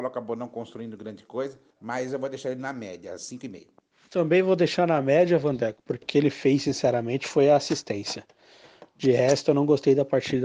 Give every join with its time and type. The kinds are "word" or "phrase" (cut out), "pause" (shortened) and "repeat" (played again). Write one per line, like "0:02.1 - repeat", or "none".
0:01.7 - pause
0:03.9 - pause
0:06.0 - phrase